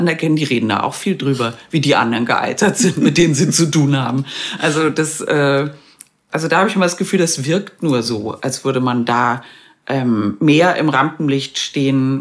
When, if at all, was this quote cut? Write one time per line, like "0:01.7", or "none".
none